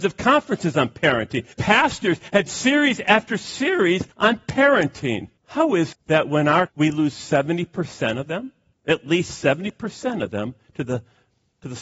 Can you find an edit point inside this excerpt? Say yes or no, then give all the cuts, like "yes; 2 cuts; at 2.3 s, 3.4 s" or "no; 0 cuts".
yes; 7 cuts; at 1.5 s, 2.5 s, 4.1 s, 5.4 s, 5.9 s, 6.7 s, 8.7 s